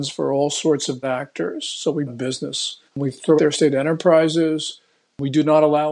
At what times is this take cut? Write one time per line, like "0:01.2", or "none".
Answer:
0:01.0
0:02.1
0:02.9
0:03.4